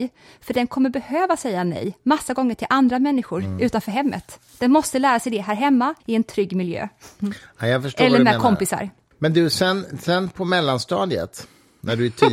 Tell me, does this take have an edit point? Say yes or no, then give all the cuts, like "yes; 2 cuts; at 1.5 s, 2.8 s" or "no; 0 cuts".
yes; 3 cuts; at 4.5 s, 6.0 s, 9.1 s